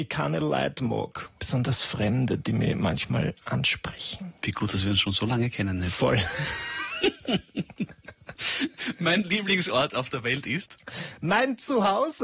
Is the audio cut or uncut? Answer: uncut